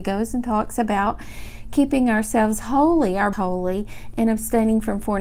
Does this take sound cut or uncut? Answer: cut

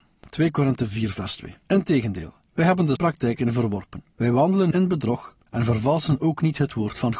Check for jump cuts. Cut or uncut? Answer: cut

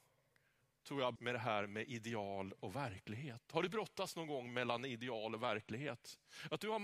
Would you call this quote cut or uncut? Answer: cut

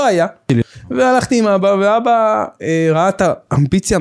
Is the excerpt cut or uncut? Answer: uncut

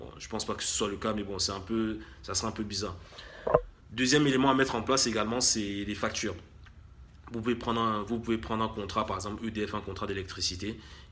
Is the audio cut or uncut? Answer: cut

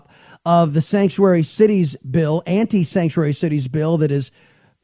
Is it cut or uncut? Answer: uncut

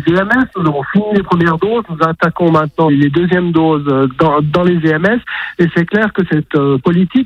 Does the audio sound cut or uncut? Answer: cut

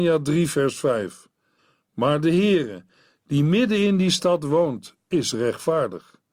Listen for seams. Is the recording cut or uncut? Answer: uncut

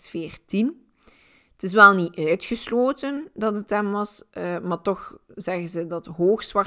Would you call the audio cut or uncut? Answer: uncut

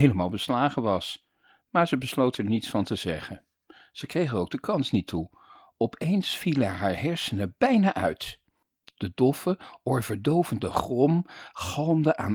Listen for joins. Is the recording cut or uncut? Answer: uncut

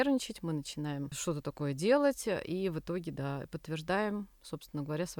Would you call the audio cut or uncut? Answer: uncut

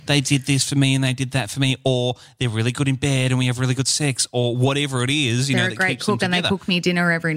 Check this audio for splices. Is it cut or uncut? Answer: uncut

